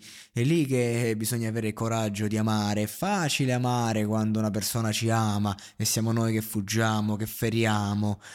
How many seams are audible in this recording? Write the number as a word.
zero